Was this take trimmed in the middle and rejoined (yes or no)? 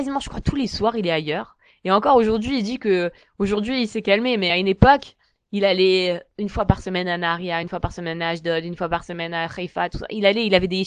no